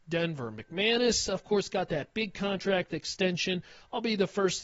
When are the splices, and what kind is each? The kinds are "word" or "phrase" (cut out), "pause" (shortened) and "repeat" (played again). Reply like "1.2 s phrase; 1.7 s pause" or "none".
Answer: none